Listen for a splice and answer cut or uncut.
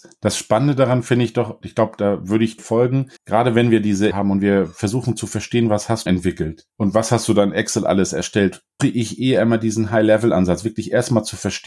cut